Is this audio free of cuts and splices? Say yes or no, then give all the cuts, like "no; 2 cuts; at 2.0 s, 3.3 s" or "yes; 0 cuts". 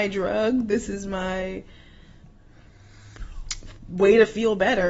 yes; 0 cuts